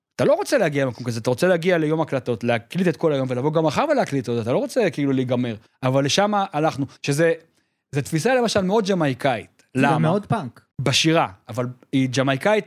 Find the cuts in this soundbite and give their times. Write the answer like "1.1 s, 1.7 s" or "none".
5.7 s, 7.0 s, 10.7 s